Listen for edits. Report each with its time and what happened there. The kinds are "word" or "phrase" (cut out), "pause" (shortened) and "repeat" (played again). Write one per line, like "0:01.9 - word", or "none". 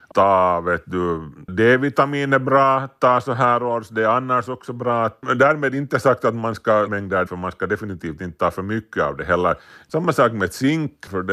0:06.9 - phrase
0:07.3 - word